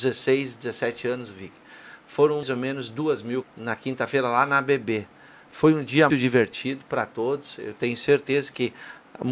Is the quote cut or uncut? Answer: cut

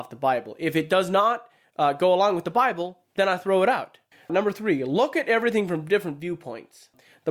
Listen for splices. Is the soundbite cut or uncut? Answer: uncut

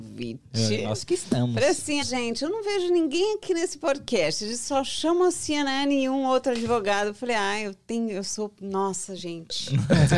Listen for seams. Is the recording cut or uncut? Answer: cut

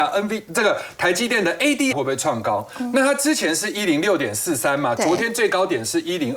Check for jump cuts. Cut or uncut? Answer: cut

